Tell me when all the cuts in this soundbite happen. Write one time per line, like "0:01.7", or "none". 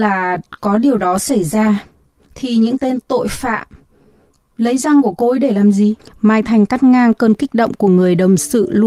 0:06.0